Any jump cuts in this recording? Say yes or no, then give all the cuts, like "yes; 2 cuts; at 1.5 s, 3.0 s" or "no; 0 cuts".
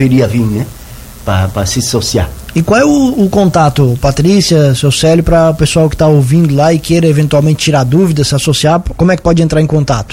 no; 0 cuts